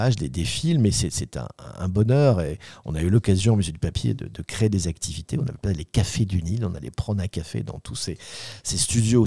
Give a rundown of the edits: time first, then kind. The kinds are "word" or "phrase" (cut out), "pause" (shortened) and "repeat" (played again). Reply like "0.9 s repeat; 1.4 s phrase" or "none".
none